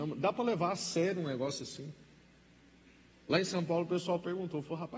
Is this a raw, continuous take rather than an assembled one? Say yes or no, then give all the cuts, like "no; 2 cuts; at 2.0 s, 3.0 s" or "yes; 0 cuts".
yes; 0 cuts